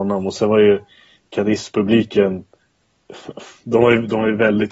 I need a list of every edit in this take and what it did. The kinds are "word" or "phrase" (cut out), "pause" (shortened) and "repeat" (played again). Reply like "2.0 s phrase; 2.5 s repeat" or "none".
none